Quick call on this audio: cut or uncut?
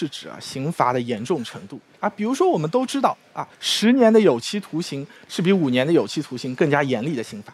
cut